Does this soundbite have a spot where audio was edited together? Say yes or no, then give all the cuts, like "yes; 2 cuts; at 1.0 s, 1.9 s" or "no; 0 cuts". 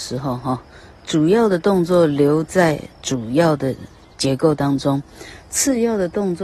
no; 0 cuts